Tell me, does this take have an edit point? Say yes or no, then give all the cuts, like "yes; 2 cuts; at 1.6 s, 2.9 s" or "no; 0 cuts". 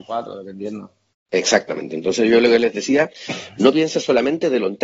yes; 1 cut; at 1.1 s